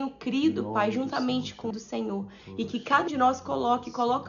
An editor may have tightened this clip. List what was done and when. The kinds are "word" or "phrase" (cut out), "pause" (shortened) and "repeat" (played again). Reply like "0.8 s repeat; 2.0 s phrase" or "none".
1.7 s phrase; 3.1 s word